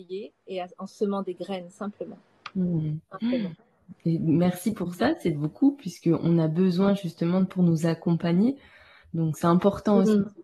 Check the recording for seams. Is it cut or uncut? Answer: cut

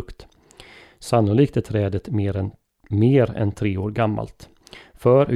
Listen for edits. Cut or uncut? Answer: uncut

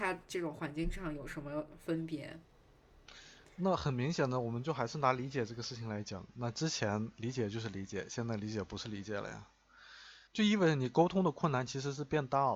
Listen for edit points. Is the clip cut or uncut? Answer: cut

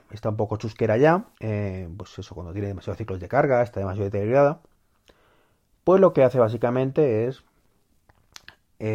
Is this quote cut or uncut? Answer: cut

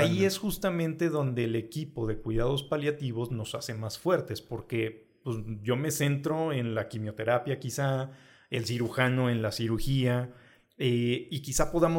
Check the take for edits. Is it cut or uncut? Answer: uncut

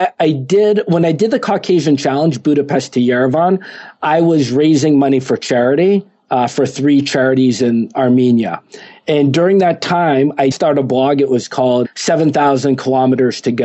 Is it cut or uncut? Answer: cut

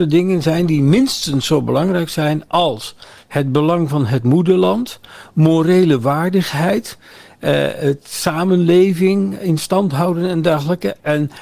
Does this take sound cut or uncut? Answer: uncut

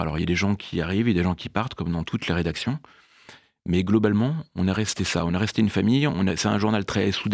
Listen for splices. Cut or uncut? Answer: uncut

